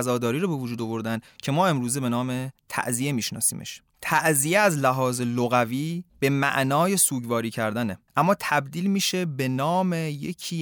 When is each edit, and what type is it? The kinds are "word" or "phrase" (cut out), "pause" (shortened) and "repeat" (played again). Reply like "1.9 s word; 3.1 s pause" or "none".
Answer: 2.6 s pause; 6.1 s pause; 8.1 s pause

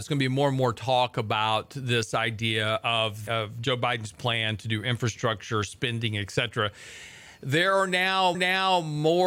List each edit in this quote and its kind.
3.3 s word; 8.3 s repeat

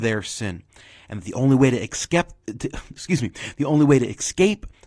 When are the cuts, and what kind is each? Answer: none

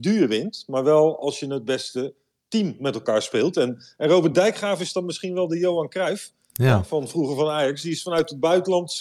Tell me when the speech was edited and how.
none

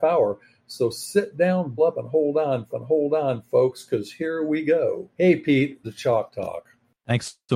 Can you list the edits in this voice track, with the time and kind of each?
1.8 s word; 2.7 s repeat; 5.1 s pause; 5.8 s word

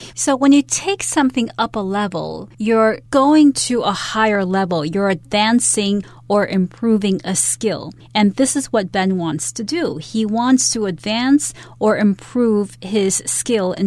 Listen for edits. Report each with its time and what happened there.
2.5 s pause

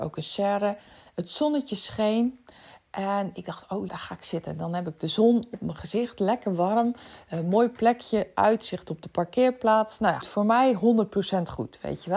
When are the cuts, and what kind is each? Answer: 3.9 s word; 10.2 s word

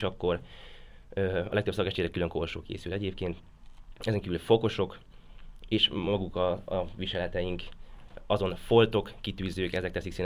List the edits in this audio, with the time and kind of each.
none

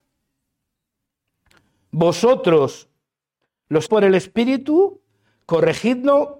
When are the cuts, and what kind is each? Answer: 3.9 s word

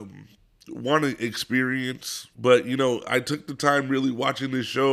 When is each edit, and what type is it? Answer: 2.3 s pause

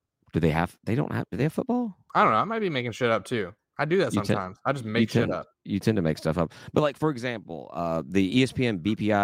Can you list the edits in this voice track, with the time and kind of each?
5.5 s pause

